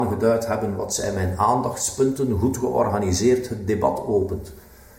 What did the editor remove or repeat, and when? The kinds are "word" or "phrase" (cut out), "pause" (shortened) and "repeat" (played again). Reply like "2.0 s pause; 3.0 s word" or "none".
none

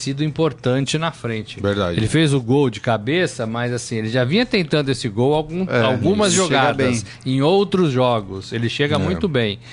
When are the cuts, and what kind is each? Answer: none

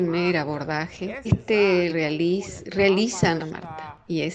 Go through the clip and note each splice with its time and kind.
1.2 s word; 1.9 s word; 3.4 s word

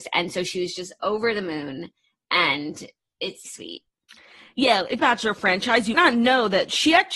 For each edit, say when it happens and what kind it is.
3.4 s word; 5.0 s phrase; 5.9 s word

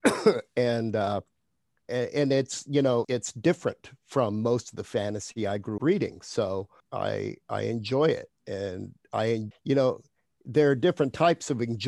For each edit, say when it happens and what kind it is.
1.8 s word; 3.0 s word; 5.8 s word; 6.8 s word; 9.5 s word

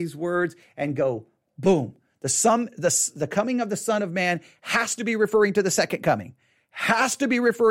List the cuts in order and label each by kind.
none

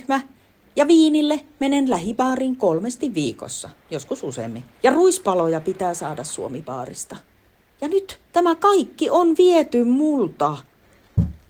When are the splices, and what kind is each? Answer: 3.8 s pause; 4.7 s pause; 8.2 s pause

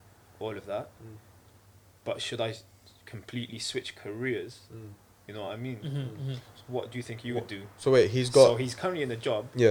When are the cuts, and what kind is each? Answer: none

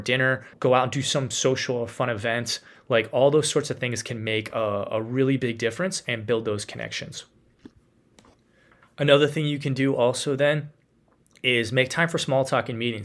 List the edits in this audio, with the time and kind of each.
none

